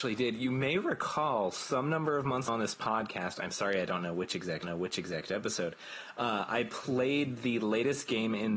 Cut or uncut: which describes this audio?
cut